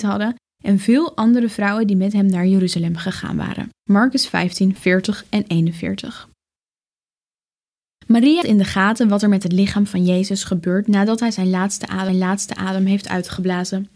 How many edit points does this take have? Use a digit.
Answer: 4